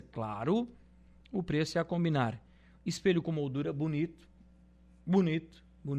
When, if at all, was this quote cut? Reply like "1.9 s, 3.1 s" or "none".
none